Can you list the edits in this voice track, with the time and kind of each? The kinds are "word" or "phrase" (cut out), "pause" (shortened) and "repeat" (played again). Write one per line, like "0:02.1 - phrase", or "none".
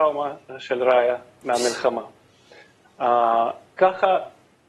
none